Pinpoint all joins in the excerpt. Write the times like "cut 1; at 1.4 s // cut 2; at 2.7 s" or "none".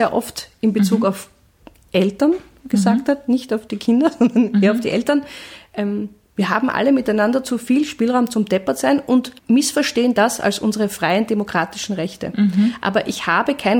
cut 1; at 9.4 s